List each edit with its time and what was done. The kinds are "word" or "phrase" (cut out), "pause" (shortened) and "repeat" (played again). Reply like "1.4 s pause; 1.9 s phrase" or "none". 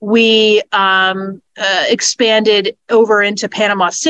none